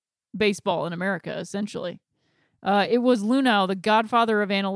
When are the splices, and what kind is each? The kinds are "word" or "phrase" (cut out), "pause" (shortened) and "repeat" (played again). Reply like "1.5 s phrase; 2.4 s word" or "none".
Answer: none